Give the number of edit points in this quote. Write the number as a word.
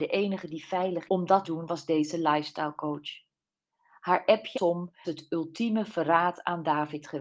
four